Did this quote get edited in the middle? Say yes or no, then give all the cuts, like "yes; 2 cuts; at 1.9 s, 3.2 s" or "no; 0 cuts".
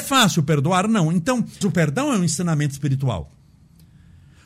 yes; 1 cut; at 1.6 s